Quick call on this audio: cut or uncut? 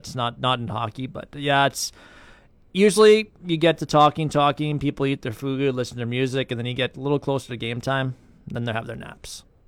uncut